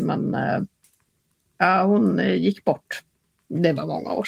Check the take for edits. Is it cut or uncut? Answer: uncut